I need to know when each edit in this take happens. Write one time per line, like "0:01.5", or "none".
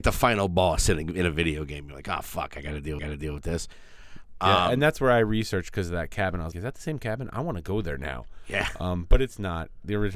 0:03.0
0:06.5